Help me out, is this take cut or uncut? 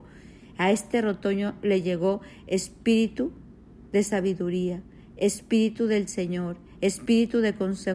uncut